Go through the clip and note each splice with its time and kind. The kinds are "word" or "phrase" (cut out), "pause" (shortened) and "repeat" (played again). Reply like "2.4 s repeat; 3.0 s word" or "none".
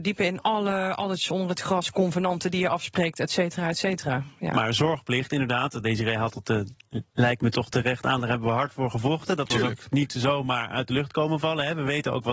none